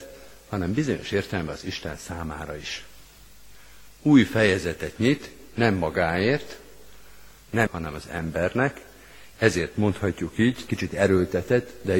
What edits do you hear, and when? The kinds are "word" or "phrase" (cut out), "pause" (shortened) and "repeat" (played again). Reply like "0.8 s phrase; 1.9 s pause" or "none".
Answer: 7.7 s phrase; 10.7 s word

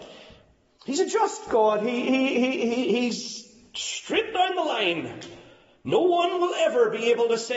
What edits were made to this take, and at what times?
none

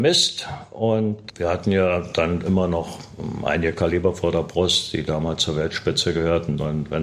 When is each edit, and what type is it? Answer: 1.3 s word

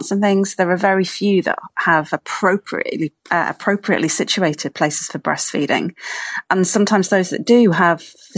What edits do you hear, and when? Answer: 3.2 s pause

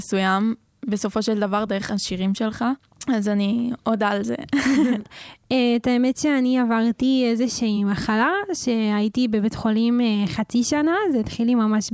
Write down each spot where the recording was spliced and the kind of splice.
none

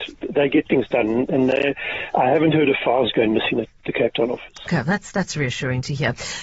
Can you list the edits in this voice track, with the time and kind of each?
3.8 s phrase

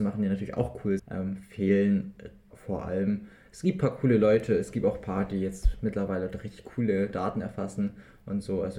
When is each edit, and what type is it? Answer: 1.0 s word; 2.5 s word

